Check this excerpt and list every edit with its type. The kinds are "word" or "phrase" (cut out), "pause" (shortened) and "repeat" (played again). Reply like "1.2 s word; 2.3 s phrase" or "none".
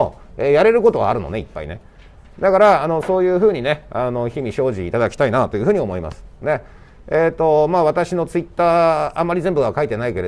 none